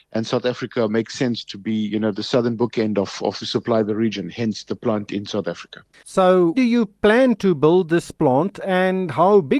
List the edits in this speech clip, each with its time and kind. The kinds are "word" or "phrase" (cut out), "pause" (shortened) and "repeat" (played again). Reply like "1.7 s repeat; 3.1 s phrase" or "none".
3.4 s phrase; 6.5 s word